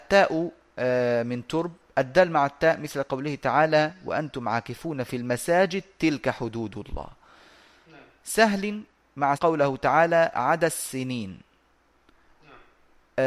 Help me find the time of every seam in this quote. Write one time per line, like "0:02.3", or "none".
0:09.3